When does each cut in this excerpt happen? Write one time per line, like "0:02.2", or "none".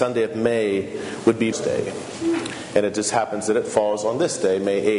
0:01.5